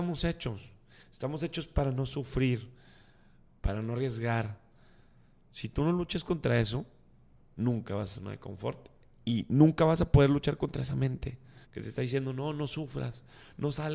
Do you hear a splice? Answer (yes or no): yes